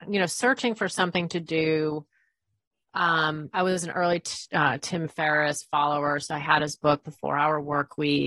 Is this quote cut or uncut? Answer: uncut